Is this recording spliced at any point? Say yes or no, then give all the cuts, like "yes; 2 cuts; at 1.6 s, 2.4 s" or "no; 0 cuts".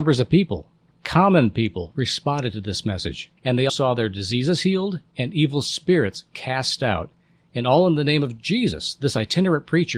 yes; 2 cuts; at 3.4 s, 3.7 s